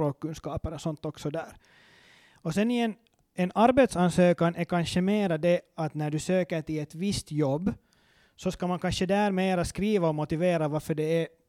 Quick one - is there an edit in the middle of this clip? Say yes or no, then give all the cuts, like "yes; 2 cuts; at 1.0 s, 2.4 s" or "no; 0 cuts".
no; 0 cuts